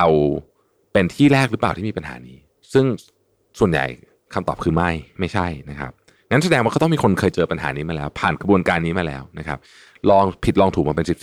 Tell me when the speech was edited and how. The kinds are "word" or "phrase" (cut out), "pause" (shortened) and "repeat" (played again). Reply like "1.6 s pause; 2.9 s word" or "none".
none